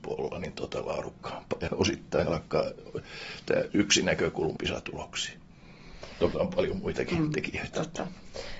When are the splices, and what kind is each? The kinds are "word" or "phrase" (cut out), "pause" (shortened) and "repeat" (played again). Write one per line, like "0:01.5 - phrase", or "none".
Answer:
0:01.7 - word
0:02.3 - word
0:03.7 - word
0:04.6 - phrase
0:06.3 - word